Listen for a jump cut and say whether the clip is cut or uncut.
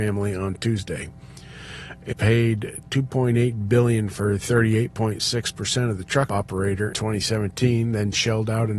cut